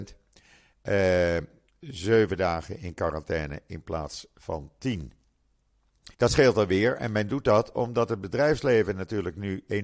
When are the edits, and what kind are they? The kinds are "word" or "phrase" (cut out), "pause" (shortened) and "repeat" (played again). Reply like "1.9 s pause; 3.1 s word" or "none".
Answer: 1.7 s phrase; 6.1 s pause

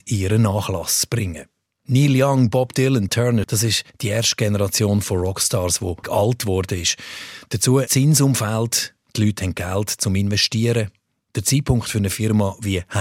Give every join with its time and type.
3.1 s word; 3.4 s word; 6.0 s word; 7.9 s word

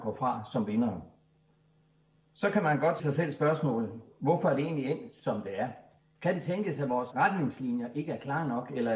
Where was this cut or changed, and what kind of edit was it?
3.0 s word; 6.0 s pause; 7.1 s word

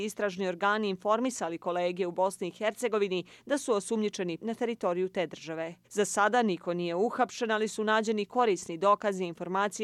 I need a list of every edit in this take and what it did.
4.4 s word; 5.8 s pause

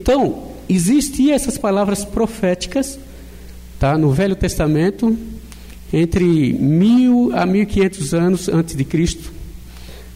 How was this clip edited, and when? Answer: none

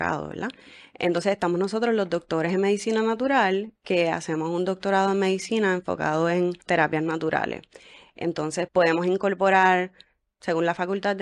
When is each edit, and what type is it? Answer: 6.6 s pause; 8.7 s word

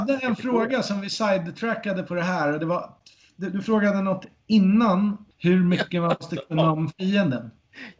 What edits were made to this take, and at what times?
none

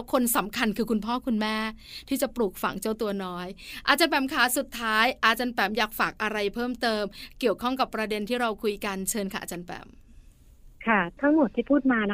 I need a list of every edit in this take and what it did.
10.7 s pause

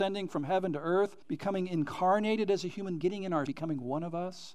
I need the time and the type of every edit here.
1.2 s pause; 3.0 s word; 3.5 s word

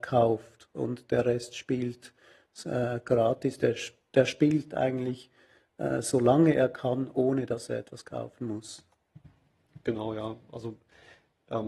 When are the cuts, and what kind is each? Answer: none

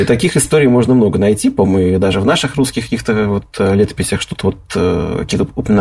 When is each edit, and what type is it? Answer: none

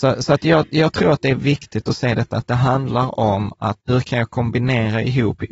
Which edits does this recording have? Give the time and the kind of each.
3.8 s pause

